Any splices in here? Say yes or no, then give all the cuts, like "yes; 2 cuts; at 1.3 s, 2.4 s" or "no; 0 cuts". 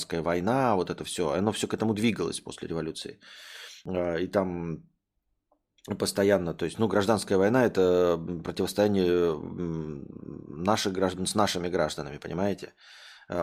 no; 0 cuts